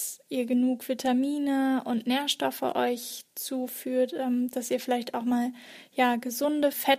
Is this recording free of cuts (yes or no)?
yes